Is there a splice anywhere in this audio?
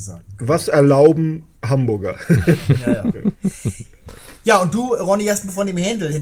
yes; 1 cut; at 1.6 s

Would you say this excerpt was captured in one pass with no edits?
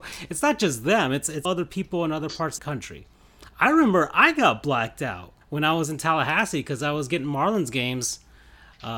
no; 3 cuts; at 1.4 s, 2.6 s, 5.4 s

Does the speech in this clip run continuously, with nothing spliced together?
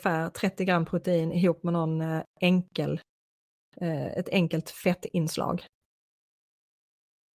yes; 0 cuts

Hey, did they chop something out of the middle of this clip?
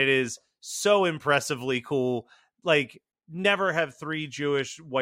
no; 0 cuts

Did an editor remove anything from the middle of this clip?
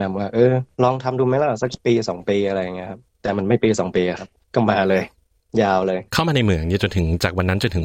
yes; 1 cut; at 6.1 s

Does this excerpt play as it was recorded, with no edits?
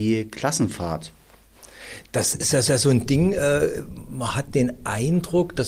no; 1 cut; at 2.7 s

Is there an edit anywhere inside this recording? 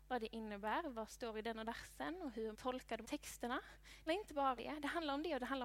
yes; 6 cuts; at 1.1 s, 1.6 s, 2.5 s, 3.0 s, 4.1 s, 4.6 s

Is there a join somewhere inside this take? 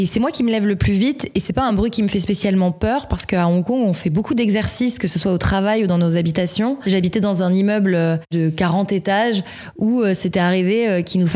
no; 0 cuts

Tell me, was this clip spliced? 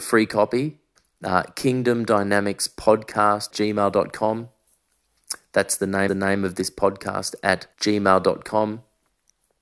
yes; 4 cuts; at 1.0 s, 3.5 s, 6.1 s, 7.7 s

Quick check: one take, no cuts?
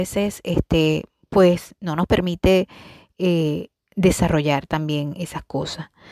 yes; 0 cuts

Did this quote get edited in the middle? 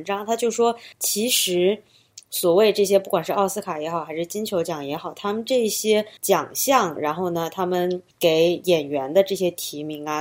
yes; 3 cuts; at 0.9 s, 6.2 s, 8.1 s

